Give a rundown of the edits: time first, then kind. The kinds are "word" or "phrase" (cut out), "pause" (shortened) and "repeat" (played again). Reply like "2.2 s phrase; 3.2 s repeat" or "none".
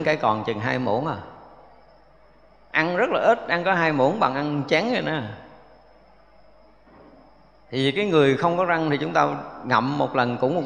none